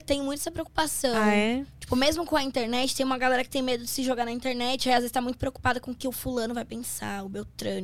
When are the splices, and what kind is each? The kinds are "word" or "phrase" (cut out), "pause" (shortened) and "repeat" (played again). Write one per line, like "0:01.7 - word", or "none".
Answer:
none

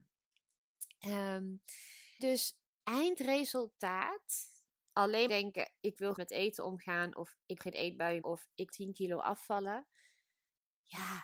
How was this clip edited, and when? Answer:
0:02.2 - word
0:02.8 - word
0:05.3 - word
0:06.2 - word
0:07.6 - word
0:08.2 - word
0:08.7 - word

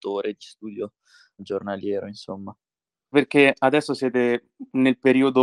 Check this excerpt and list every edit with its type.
0:01.4 - word
0:03.1 - word

